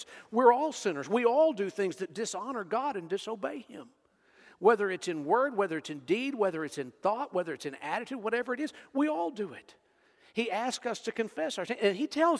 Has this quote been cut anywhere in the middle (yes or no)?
no